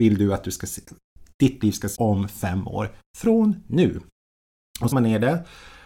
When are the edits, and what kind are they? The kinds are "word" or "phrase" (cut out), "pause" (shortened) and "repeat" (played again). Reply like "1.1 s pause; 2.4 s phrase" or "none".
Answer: 1.9 s word; 4.9 s phrase